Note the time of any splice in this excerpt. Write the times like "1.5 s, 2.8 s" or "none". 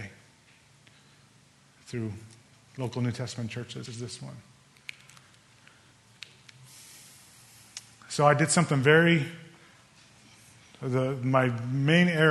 3.9 s